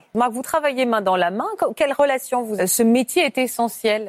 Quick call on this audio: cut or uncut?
cut